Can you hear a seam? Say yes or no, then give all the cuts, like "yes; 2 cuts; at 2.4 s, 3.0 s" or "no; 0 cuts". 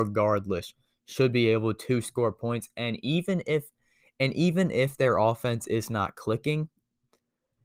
no; 0 cuts